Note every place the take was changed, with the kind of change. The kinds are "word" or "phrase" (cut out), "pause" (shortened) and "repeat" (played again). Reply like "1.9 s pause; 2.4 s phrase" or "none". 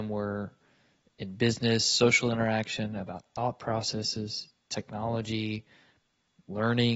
none